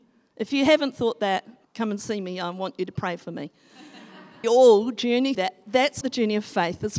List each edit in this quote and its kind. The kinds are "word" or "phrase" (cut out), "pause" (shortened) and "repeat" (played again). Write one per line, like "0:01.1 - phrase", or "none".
0:01.6 - pause
0:04.4 - phrase
0:05.3 - word
0:06.0 - word